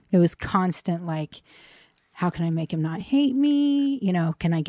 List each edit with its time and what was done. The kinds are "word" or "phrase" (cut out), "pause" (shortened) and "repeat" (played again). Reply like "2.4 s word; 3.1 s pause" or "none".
none